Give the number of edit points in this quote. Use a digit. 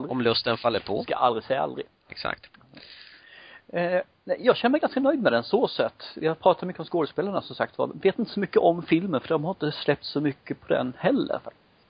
1